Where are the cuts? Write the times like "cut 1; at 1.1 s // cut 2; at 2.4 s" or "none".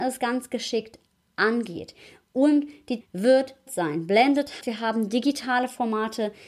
cut 1; at 3.0 s // cut 2; at 3.7 s // cut 3; at 4.6 s